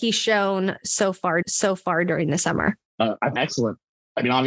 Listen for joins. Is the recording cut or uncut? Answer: cut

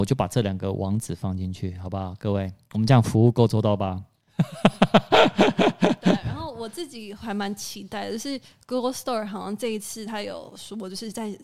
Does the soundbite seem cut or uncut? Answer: uncut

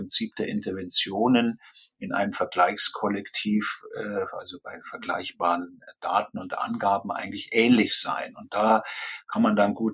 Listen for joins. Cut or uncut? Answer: uncut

